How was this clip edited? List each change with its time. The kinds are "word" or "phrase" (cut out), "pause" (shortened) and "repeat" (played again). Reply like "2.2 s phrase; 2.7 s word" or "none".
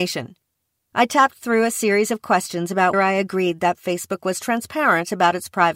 2.9 s word